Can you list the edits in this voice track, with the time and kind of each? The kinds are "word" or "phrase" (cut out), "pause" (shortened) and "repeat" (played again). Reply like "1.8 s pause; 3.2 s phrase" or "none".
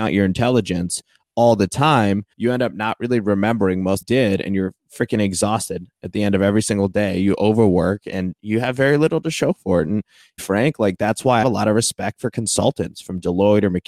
2.3 s pause; 4.0 s phrase; 10.4 s phrase; 11.4 s phrase

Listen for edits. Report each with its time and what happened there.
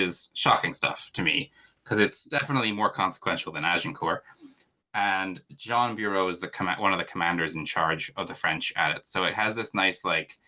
none

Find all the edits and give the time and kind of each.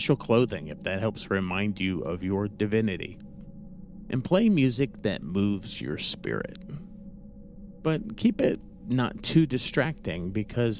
none

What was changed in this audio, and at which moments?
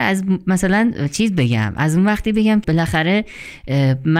2.6 s word

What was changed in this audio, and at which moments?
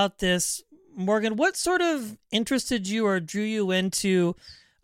none

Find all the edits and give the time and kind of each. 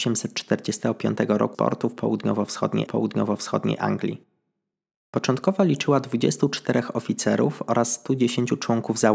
1.5 s word; 2.9 s repeat

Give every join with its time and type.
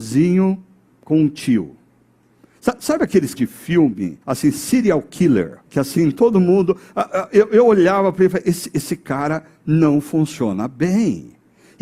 3.4 s word; 4.2 s pause; 5.7 s pause

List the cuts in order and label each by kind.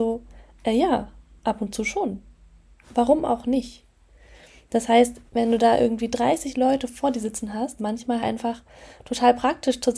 5.3 s pause; 7.8 s phrase; 8.2 s word

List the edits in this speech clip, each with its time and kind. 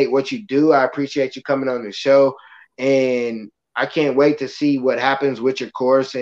none

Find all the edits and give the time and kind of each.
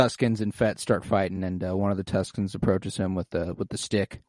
none

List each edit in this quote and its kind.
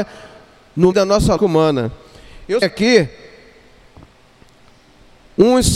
0.9 s word; 1.4 s word; 2.6 s word

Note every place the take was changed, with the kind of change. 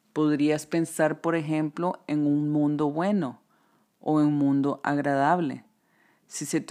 none

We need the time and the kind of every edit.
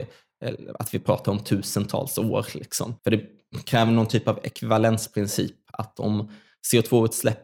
3.0 s pause

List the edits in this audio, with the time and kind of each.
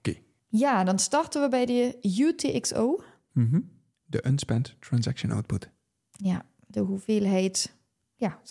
none

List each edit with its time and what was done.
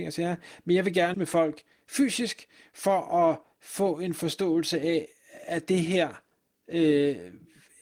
1.1 s word

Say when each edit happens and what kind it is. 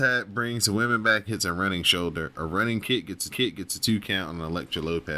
1.3 s phrase; 3.3 s repeat

